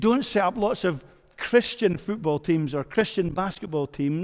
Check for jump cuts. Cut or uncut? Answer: uncut